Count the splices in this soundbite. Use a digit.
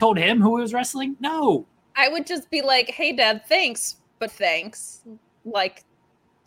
1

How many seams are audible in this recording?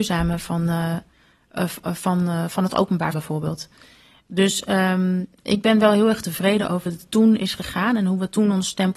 2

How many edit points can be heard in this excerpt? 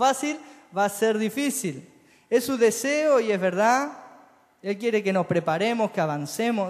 0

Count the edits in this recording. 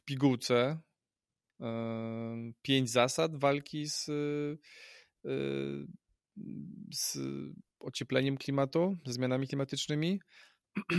0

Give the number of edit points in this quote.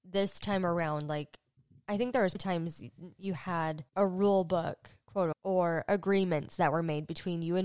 3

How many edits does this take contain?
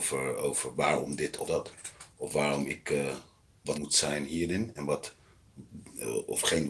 3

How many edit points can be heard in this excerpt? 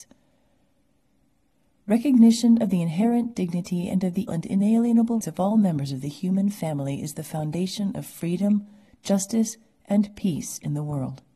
2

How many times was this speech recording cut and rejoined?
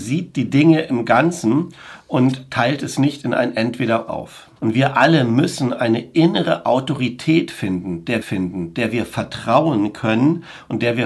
3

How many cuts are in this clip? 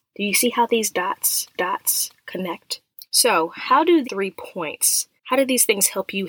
3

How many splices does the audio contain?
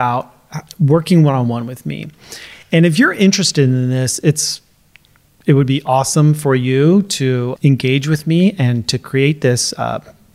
1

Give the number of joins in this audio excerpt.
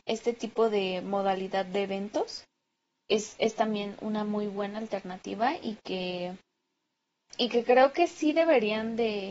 0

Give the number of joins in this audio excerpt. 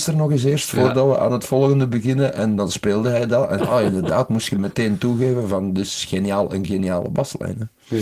1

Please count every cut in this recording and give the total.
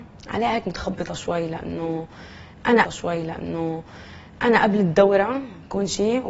1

